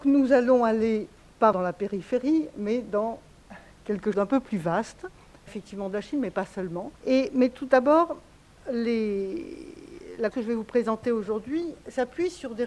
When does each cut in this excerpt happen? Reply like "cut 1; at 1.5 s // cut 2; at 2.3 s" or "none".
cut 1; at 1.5 s // cut 2; at 4.1 s // cut 3; at 5.5 s // cut 4; at 7.0 s // cut 5; at 10.3 s